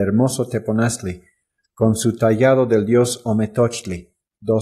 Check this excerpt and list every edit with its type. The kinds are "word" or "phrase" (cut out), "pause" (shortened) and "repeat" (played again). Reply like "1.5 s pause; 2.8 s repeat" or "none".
none